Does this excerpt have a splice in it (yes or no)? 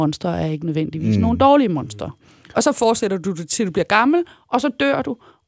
no